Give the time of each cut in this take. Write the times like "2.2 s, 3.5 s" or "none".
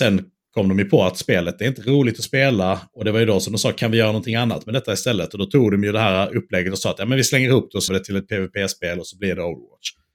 7.9 s